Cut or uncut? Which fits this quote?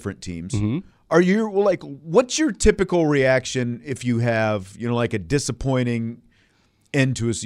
uncut